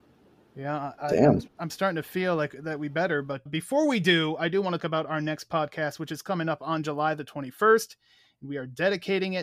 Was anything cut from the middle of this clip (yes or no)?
yes